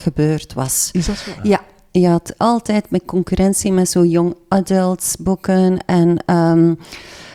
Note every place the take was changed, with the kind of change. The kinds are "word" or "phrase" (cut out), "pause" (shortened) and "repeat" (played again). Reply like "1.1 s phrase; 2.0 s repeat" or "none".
none